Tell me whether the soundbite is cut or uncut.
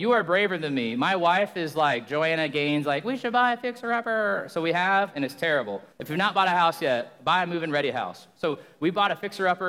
cut